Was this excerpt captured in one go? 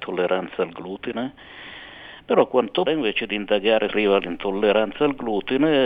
no; 2 cuts; at 2.9 s, 3.9 s

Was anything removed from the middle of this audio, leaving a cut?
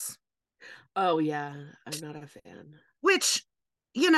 no; 0 cuts

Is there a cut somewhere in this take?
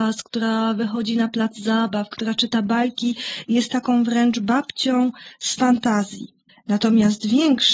yes; 1 cut; at 6.5 s

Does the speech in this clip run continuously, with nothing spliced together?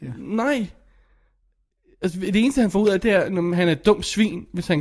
yes; 0 cuts

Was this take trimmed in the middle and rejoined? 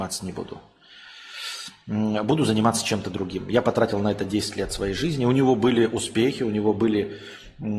no; 0 cuts

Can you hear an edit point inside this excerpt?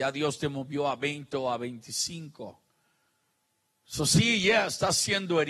no; 0 cuts

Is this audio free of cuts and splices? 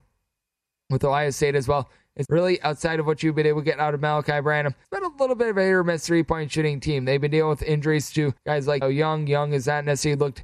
no; 4 cuts; at 2.2 s, 4.8 s, 8.4 s, 8.8 s

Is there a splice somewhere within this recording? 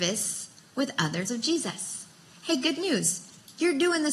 yes; 1 cut; at 1.3 s

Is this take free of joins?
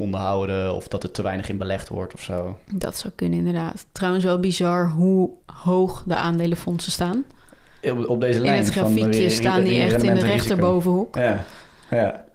no; 2 cuts; at 2.6 s, 5.4 s

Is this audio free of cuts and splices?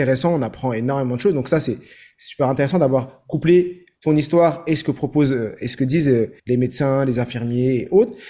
no; 1 cut; at 6.4 s

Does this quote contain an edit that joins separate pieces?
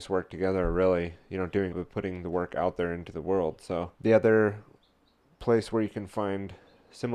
yes; 2 cuts; at 1.7 s, 3.9 s

